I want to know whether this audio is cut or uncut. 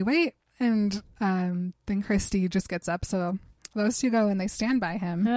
uncut